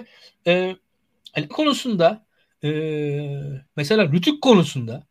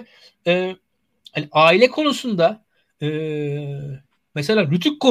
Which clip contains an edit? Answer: first; 2 cuts; at 1.5 s, 3.7 s

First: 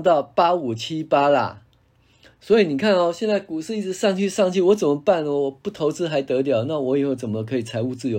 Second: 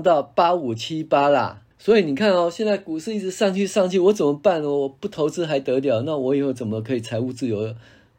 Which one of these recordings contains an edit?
second; 1 cut; at 1.7 s

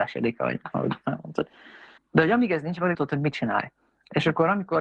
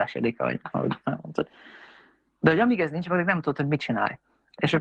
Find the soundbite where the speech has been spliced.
first; 2 cuts; at 2.0 s, 2.9 s

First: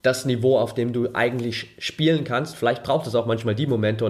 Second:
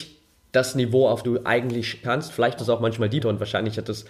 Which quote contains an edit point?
second; 4 cuts; at 1.2 s, 2.0 s, 2.6 s, 3.2 s

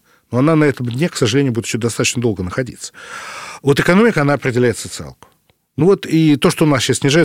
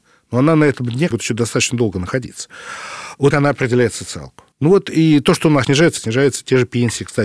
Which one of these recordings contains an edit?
second; 5 cuts; at 1.1 s, 3.3 s, 4.5 s, 5.6 s, 6.0 s

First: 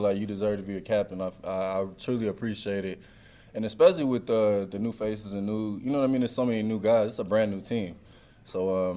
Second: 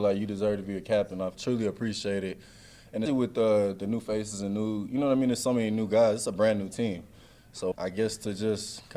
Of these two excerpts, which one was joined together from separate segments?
second; 3 cuts; at 1.3 s, 3.1 s, 7.7 s

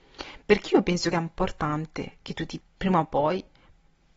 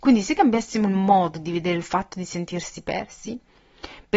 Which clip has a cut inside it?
first; 2 cuts; at 1.1 s, 2.6 s

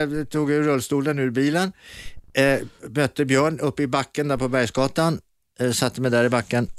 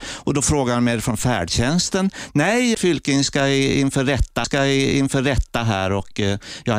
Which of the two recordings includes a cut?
second; 2 cuts; at 2.7 s, 4.4 s

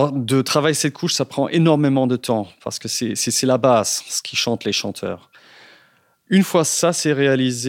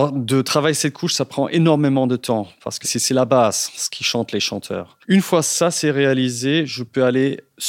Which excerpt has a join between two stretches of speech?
second; 2 cuts; at 2.8 s, 5.0 s

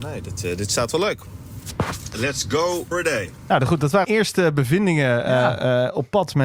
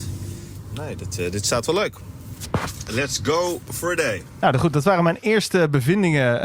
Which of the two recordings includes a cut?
first; 2 cuts; at 2.9 s, 4.0 s

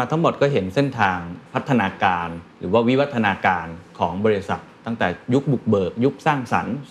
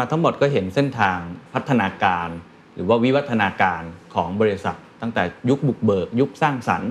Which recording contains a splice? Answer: first; 1 cut; at 2.5 s

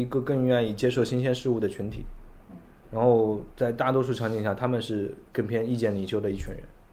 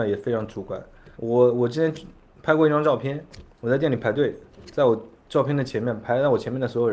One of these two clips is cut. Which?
second; 2 cuts; at 1.1 s, 3.5 s

